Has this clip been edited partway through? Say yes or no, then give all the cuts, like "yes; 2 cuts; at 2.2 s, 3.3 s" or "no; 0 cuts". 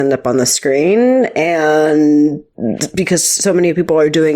no; 0 cuts